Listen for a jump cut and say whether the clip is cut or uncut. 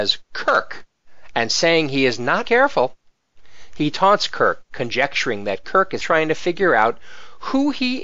cut